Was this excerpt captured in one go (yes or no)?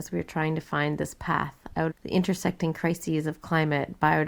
no